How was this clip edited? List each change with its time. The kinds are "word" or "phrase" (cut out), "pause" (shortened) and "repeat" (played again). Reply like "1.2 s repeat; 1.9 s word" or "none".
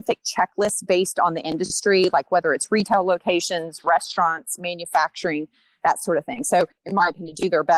none